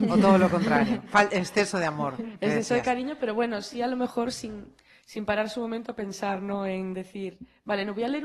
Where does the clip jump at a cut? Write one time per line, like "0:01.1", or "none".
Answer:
none